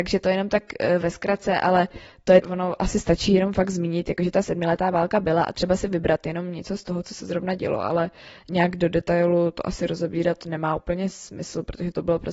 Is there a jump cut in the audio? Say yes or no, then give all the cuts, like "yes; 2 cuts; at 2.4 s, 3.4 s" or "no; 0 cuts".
yes; 1 cut; at 2.4 s